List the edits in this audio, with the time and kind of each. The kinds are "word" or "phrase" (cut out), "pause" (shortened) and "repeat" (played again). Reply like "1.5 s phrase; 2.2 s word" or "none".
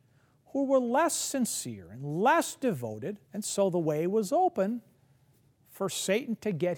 3.3 s pause